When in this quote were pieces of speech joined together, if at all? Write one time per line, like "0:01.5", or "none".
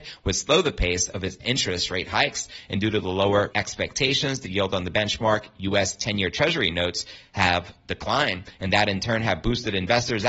0:03.5